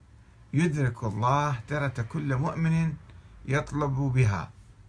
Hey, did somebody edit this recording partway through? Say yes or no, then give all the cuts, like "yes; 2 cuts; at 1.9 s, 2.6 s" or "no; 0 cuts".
no; 0 cuts